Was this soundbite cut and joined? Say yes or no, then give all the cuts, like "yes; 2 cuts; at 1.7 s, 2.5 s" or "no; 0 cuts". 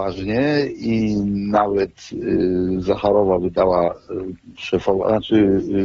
no; 0 cuts